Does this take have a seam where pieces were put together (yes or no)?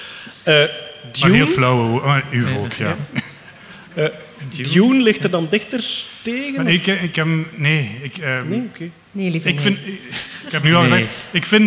yes